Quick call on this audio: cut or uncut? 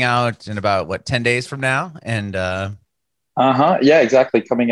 uncut